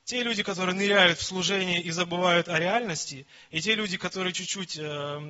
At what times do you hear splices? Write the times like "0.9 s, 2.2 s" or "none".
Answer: none